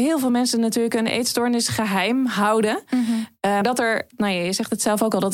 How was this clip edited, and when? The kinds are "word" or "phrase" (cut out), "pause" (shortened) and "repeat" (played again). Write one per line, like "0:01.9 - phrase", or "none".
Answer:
0:03.6 - word